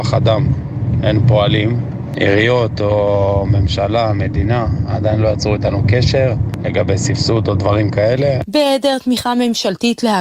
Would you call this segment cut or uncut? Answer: uncut